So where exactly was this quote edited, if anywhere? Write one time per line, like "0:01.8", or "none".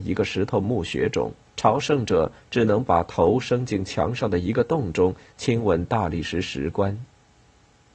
0:01.5